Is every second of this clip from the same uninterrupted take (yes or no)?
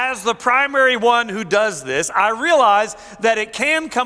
yes